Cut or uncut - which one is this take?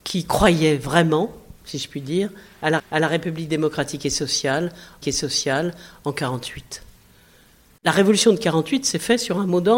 cut